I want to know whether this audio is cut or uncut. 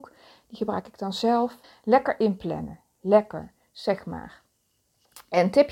cut